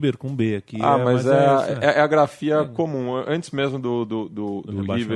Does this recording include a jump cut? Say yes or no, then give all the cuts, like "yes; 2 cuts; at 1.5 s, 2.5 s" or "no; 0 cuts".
no; 0 cuts